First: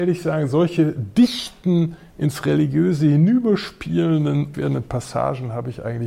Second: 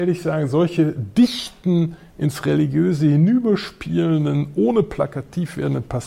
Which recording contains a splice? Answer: first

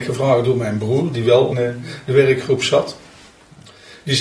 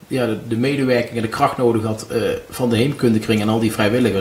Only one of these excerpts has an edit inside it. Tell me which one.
first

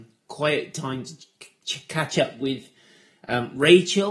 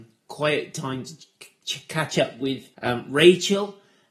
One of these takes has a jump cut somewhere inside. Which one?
second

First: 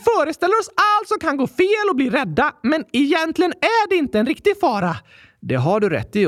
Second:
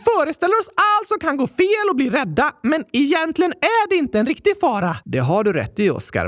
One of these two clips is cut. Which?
second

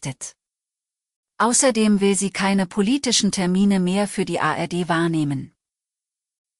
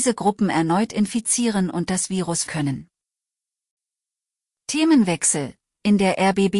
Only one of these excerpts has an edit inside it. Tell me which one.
second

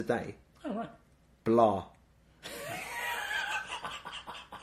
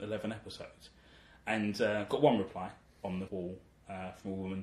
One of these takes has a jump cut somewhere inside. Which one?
second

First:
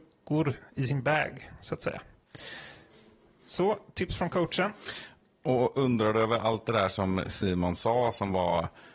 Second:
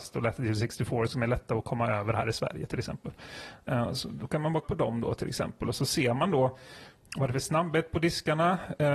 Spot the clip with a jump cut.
second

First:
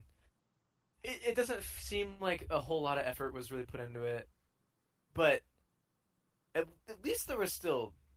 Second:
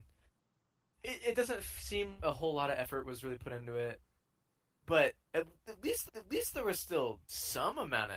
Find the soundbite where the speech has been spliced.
second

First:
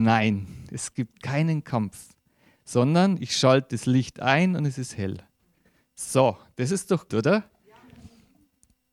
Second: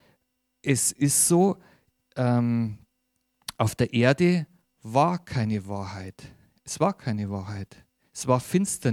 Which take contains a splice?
first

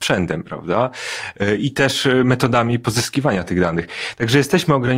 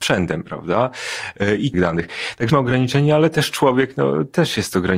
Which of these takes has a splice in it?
second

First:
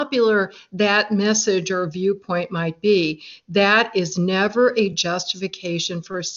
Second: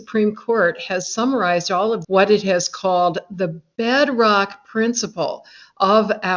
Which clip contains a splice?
second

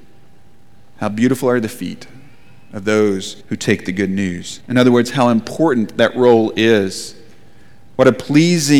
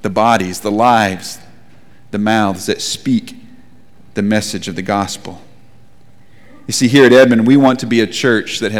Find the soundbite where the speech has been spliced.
first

